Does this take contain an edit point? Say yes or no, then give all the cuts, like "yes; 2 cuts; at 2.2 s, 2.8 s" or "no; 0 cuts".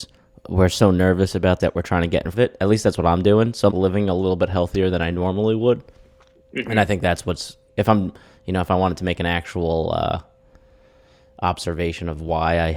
yes; 4 cuts; at 1.6 s, 2.3 s, 3.7 s, 7.7 s